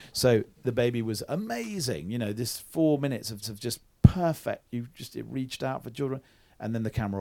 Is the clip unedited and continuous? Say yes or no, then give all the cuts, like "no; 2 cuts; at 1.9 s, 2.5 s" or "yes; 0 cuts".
no; 1 cut; at 3.4 s